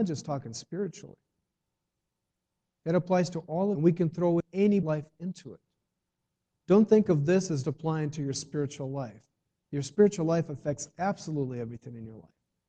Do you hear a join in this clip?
yes; 4 cuts; at 3.7 s, 4.4 s, 4.8 s, 7.6 s

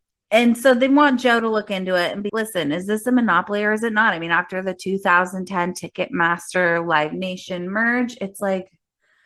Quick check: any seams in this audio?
yes; 1 cut; at 2.3 s

